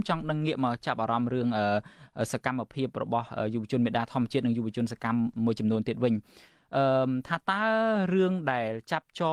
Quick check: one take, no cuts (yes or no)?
yes